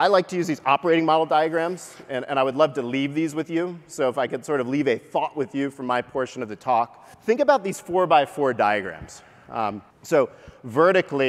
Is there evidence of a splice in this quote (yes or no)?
yes